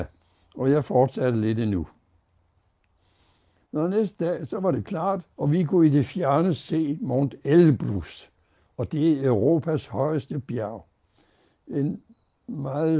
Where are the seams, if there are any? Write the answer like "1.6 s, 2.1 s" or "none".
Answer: 5.3 s